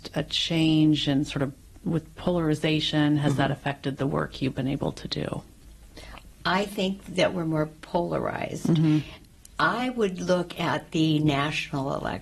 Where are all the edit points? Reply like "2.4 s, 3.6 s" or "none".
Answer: none